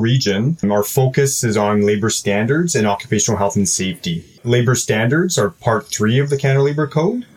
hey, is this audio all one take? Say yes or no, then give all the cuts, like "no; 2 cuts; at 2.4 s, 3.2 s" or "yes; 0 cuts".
yes; 0 cuts